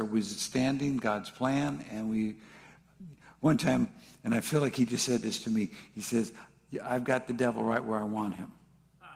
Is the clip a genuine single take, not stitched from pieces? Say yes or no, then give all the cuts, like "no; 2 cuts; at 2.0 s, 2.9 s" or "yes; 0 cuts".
yes; 0 cuts